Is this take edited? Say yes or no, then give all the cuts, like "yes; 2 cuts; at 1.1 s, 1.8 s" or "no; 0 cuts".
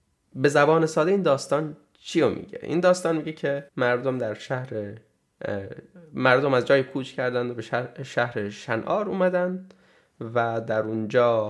yes; 1 cut; at 3.7 s